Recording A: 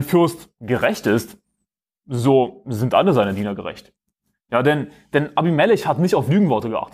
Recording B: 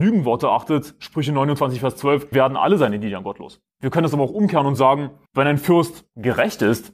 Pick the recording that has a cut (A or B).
B